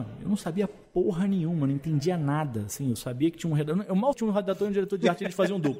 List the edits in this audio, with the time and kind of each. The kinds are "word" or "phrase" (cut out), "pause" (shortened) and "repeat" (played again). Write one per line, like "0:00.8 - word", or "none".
0:04.1 - word